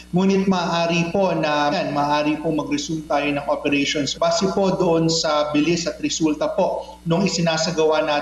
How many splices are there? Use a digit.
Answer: 2